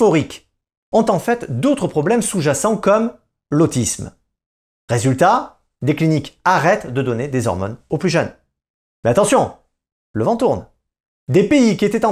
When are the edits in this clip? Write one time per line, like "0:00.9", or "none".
none